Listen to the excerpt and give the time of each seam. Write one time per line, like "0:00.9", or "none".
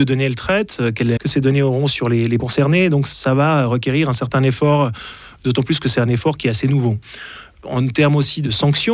0:01.2
0:02.4